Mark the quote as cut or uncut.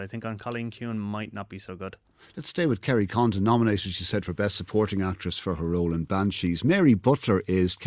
uncut